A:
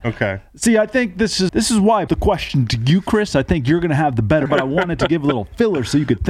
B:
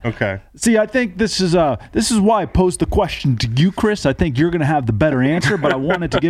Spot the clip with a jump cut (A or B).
A